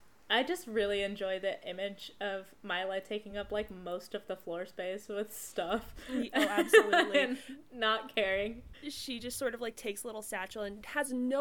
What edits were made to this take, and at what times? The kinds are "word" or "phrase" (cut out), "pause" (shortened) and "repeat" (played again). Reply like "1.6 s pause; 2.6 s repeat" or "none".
none